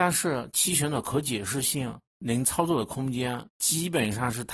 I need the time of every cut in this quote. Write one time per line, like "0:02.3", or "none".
0:03.5